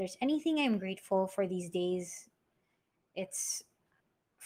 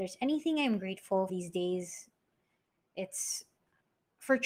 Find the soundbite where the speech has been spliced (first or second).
second